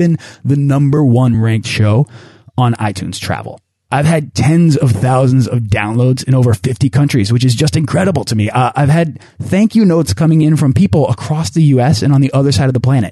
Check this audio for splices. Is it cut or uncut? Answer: uncut